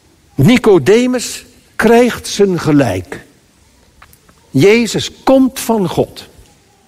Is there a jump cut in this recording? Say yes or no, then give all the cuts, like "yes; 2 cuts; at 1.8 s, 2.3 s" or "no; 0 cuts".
no; 0 cuts